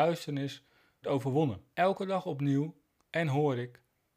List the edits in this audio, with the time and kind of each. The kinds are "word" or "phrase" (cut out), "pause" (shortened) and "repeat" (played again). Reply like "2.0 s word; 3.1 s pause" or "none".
1.0 s word; 1.7 s pause; 3.0 s word